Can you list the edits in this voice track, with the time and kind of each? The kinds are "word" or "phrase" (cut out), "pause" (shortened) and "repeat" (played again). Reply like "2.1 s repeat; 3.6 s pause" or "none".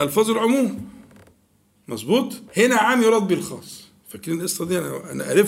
2.5 s pause